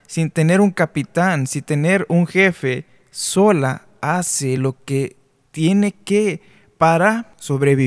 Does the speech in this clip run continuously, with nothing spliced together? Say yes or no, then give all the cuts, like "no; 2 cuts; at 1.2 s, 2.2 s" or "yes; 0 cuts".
yes; 0 cuts